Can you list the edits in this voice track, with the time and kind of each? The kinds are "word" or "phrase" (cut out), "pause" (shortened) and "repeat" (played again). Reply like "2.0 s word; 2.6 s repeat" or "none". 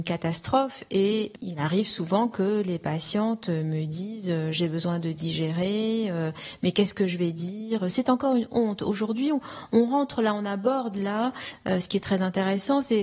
none